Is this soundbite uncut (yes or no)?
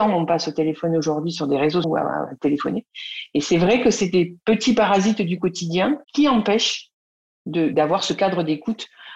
no